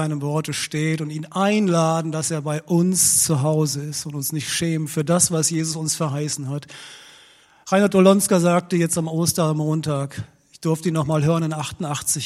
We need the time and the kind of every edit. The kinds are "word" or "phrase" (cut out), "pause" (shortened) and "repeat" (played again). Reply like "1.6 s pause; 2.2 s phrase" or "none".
none